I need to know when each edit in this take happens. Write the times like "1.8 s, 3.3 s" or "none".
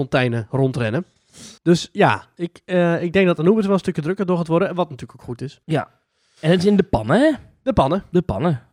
1.6 s, 5.6 s